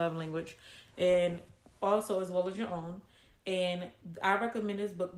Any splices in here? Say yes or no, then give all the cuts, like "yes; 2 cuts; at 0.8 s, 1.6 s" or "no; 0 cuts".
no; 0 cuts